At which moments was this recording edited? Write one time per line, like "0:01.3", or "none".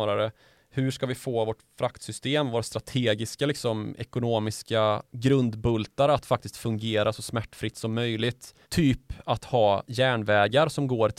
0:08.6